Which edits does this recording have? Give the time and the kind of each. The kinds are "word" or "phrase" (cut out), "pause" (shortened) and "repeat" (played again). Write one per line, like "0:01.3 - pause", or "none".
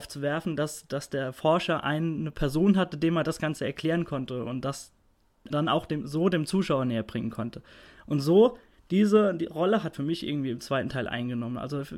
0:05.5 - word
0:09.9 - word